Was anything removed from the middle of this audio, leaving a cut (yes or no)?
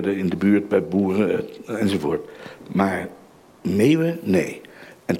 no